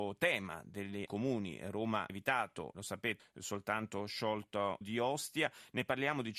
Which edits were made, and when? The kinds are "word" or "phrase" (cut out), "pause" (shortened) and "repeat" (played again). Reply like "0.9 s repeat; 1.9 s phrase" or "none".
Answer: 1.1 s phrase; 2.1 s word; 2.7 s word; 3.2 s phrase; 4.8 s phrase